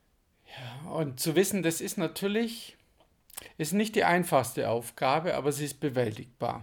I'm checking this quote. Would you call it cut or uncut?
uncut